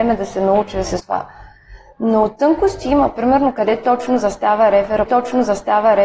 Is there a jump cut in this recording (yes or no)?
yes